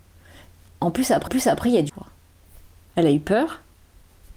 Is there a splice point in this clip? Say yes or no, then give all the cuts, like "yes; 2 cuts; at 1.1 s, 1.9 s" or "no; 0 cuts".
yes; 2 cuts; at 1.3 s, 1.9 s